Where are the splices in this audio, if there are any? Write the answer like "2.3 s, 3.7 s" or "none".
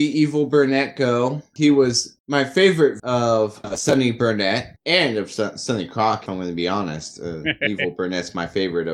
3.0 s, 6.3 s

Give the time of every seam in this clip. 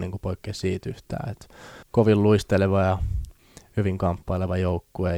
1.8 s

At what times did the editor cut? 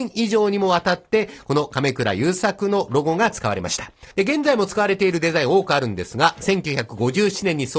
4.1 s

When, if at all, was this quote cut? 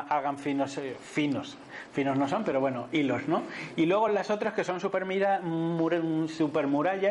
none

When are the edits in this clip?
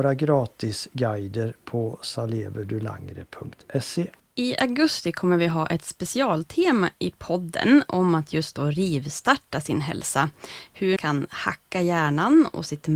4.2 s, 11.0 s

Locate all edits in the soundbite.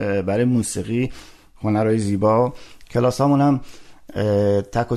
none

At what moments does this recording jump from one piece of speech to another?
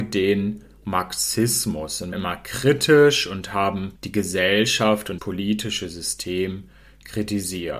2.1 s, 4.0 s, 5.2 s

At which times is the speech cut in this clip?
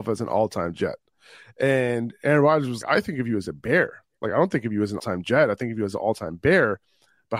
2.8 s, 5.0 s

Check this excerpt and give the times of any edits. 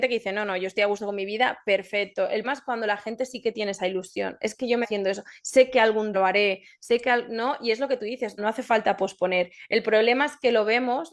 2.4 s, 4.8 s, 6.1 s, 8.4 s

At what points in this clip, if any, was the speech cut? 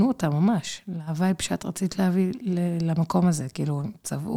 none

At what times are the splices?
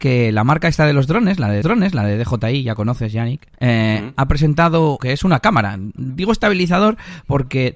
1.6 s, 3.6 s, 5.0 s

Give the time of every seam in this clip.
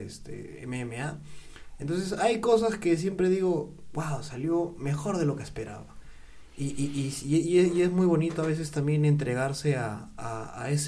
none

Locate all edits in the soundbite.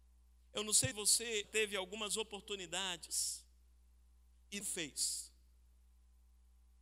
0.9 s, 1.4 s, 4.6 s

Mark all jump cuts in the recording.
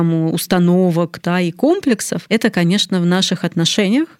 none

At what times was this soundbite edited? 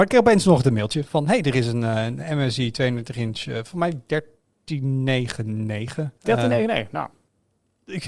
6.2 s

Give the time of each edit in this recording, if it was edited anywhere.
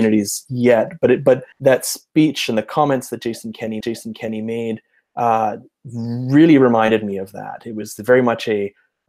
1.5 s, 3.8 s

